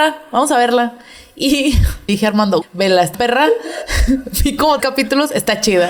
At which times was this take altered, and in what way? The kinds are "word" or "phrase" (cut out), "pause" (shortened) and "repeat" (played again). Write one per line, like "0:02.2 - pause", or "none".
0:02.1 - word
0:02.6 - word
0:03.1 - word
0:04.8 - word